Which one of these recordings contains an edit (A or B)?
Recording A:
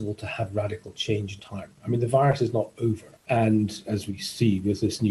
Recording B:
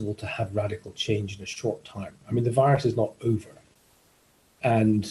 A